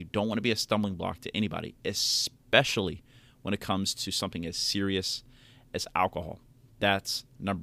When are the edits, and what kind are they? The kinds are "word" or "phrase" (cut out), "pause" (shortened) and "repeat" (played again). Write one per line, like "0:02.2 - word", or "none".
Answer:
none

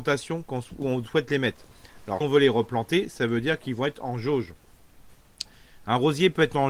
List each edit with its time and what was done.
0:02.2 - word

